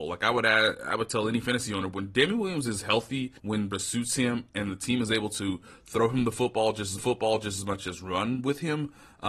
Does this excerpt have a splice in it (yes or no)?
yes